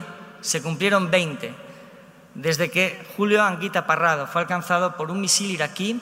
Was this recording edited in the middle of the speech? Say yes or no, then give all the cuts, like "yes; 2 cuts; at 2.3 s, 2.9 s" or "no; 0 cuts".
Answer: no; 0 cuts